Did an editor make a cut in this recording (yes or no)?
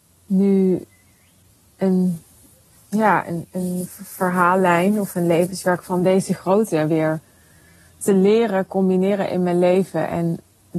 no